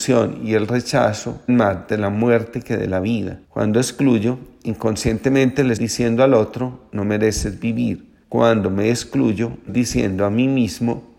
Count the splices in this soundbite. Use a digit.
5